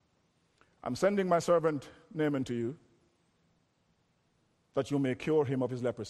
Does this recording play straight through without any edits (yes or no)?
yes